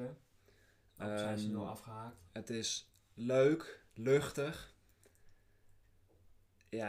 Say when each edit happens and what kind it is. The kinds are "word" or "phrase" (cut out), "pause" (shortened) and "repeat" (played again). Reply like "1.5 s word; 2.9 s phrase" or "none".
3.9 s pause

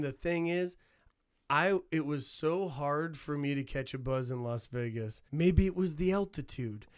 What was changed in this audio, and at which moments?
5.3 s pause

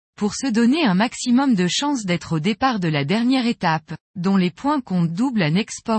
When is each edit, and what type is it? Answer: none

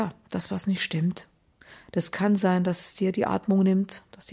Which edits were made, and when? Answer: none

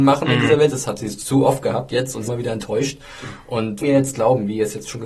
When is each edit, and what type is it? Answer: 2.3 s word; 3.8 s word

